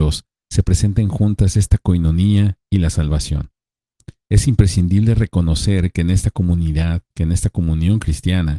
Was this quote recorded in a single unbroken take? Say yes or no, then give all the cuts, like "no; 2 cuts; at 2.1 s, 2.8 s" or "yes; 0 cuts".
no; 2 cuts; at 2.6 s, 7.1 s